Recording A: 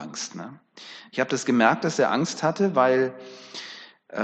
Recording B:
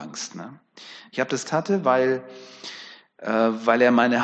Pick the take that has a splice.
B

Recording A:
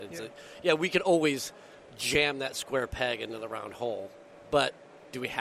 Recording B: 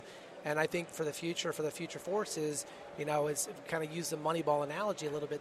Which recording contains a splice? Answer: B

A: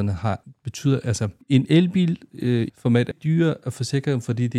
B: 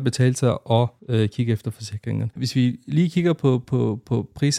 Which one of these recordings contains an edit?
A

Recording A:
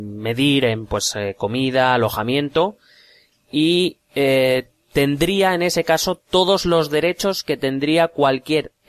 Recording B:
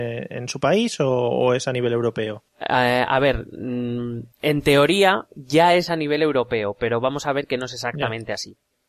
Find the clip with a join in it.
B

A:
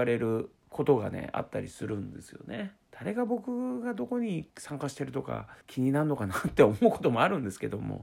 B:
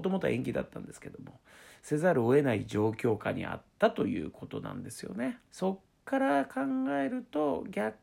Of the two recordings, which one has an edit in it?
A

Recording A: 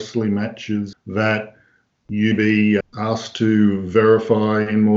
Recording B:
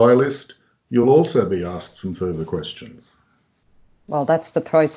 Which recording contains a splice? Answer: A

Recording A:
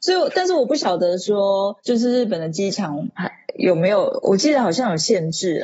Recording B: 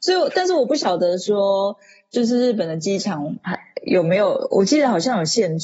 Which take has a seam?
A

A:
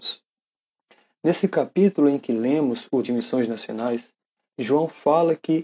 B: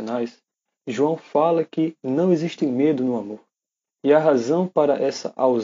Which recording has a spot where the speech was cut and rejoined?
A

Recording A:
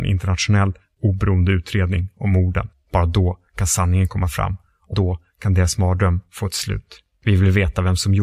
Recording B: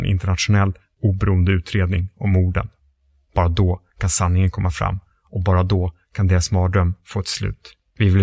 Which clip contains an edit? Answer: A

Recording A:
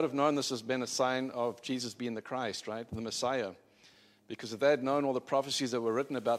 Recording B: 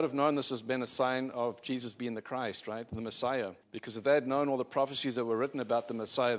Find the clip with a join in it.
B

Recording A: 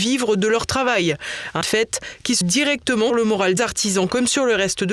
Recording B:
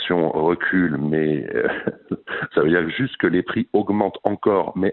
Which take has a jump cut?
A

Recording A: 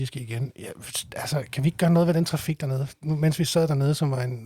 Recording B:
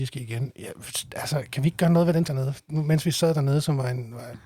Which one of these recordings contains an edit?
B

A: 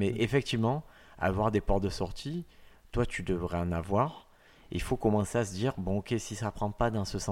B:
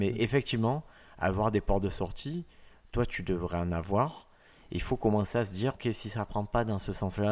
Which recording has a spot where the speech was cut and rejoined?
B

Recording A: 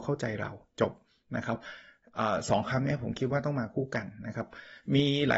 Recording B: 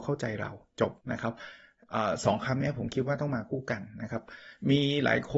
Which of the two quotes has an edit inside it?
B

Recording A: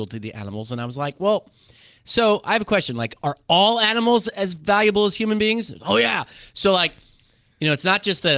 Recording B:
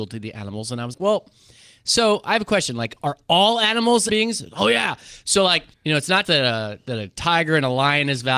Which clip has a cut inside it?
B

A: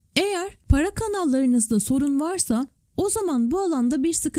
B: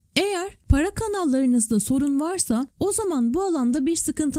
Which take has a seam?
B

